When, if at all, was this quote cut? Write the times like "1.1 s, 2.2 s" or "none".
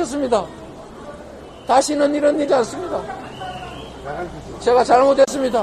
2.5 s